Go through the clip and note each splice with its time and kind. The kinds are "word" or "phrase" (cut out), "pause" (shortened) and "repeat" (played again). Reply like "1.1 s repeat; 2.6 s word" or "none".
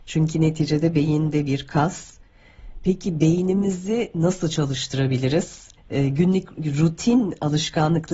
5.8 s pause